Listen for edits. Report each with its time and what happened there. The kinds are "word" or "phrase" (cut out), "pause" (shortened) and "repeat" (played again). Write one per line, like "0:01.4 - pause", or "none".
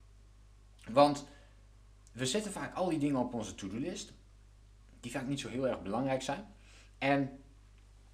none